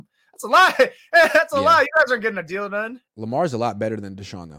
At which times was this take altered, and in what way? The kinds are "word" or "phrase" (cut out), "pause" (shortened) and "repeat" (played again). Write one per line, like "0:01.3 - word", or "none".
0:03.1 - pause